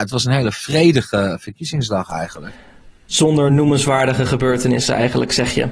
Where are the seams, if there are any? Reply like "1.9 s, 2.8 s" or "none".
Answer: none